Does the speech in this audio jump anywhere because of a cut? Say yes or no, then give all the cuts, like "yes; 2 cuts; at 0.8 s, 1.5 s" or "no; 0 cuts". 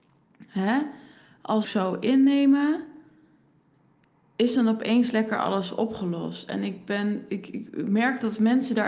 yes; 1 cut; at 1.6 s